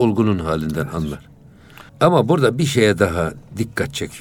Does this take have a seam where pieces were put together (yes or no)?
yes